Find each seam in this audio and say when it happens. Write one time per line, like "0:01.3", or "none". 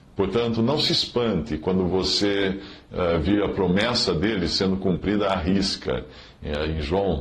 none